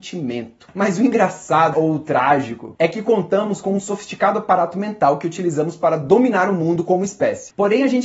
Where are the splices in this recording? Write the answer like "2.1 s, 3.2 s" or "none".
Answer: 1.7 s